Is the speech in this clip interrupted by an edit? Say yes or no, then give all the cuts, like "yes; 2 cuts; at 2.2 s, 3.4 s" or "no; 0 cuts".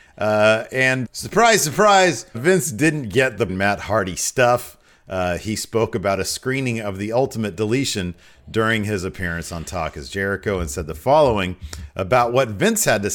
yes; 3 cuts; at 1.0 s, 2.3 s, 3.5 s